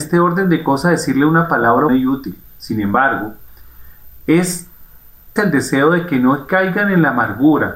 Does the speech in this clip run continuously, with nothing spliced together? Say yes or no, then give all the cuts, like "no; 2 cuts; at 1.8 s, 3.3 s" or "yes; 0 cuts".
no; 2 cuts; at 1.9 s, 5.4 s